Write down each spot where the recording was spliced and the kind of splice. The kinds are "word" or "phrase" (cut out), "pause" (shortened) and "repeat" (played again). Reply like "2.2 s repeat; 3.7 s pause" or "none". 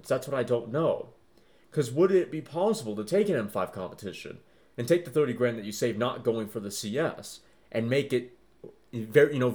none